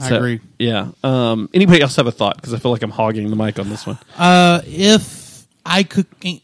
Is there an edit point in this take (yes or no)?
yes